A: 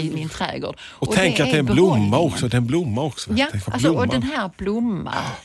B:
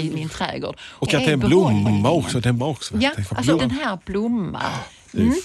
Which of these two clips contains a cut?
B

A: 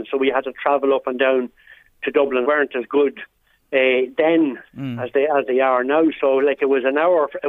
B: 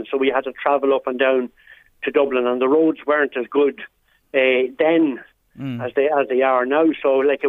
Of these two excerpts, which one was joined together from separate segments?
A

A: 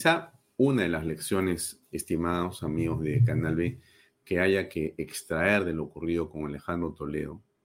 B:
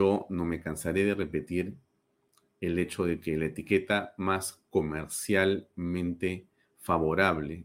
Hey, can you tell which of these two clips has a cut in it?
A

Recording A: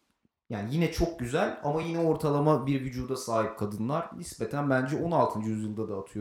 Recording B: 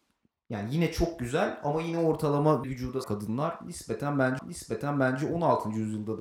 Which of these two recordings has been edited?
B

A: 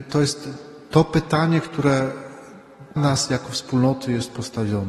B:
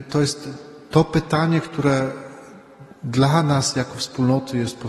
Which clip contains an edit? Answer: A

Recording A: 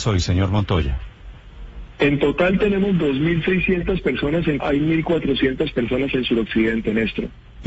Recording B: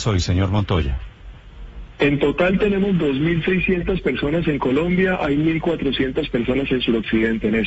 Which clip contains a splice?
A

